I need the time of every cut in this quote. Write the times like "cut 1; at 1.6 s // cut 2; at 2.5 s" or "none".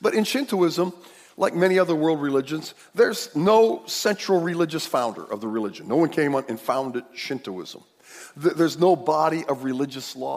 none